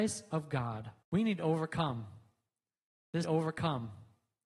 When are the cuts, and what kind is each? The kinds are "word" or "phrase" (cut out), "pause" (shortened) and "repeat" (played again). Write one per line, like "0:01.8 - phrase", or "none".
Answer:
0:01.0 - pause
0:03.2 - repeat